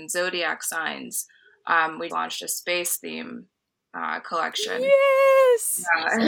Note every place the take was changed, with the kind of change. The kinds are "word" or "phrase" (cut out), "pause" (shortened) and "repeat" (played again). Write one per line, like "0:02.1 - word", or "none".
0:02.1 - word